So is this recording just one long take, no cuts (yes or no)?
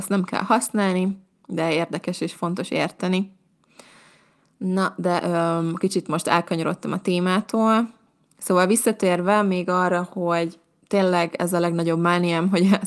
yes